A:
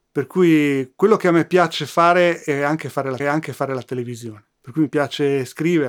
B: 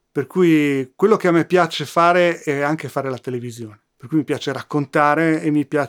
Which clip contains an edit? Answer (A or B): A